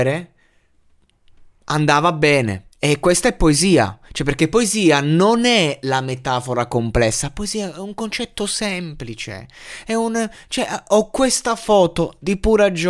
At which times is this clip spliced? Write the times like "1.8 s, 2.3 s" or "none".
2.7 s